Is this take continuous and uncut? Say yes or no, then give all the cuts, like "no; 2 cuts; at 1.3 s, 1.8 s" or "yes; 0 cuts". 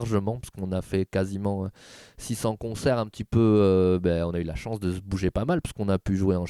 yes; 0 cuts